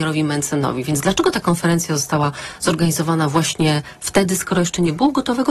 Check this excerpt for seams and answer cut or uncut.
uncut